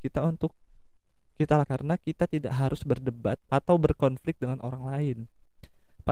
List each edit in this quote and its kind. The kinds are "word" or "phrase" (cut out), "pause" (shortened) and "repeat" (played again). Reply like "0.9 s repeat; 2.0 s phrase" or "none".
1.6 s word; 3.5 s word

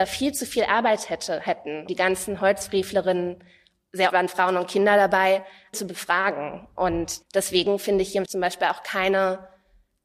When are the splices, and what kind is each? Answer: 1.9 s word; 4.1 s word; 5.7 s word; 8.3 s word

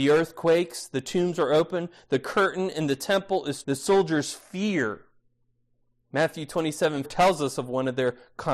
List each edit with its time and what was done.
3.6 s word; 7.0 s word

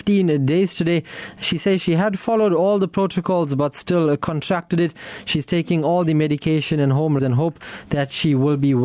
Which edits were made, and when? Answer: 7.2 s word

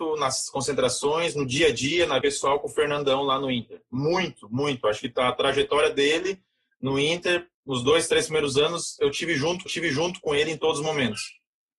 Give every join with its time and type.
2.2 s word; 9.7 s repeat

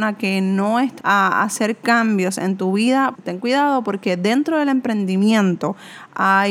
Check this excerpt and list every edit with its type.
1.0 s word; 3.1 s word

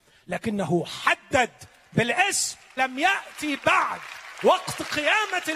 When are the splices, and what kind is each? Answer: 2.8 s word

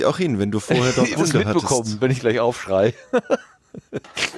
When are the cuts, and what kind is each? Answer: 1.2 s word

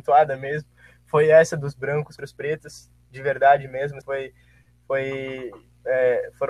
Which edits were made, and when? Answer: 2.2 s word; 4.0 s word

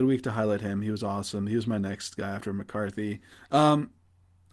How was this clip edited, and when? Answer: 3.3 s pause

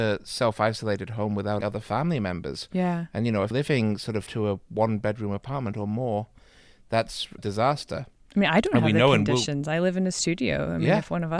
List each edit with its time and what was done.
1.6 s word; 3.5 s word; 4.3 s word; 7.4 s word

